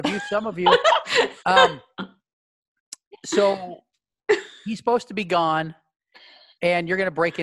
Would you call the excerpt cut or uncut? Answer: cut